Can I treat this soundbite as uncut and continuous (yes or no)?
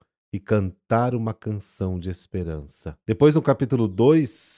no